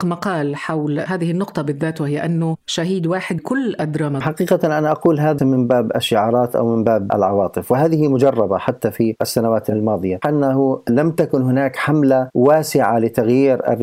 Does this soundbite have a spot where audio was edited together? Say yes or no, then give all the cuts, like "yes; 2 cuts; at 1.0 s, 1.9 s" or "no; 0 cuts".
yes; 4 cuts; at 3.4 s, 4.2 s, 5.4 s, 10.2 s